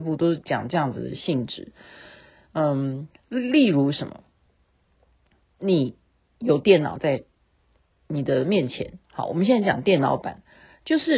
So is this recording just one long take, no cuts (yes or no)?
yes